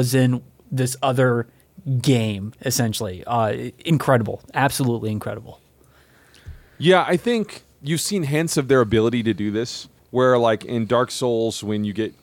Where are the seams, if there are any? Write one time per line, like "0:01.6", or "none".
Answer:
0:07.7
0:10.0